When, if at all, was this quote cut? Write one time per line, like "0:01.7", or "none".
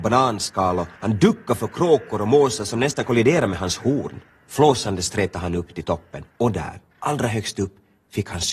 0:01.0
0:04.3
0:06.3
0:06.9